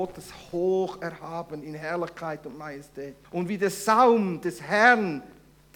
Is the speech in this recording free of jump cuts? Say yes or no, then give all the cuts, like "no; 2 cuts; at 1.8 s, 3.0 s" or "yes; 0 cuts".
no; 1 cut; at 3.2 s